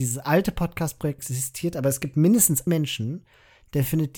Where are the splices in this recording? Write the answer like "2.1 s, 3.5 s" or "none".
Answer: 1.2 s, 2.7 s